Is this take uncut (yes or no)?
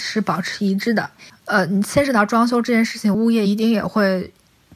no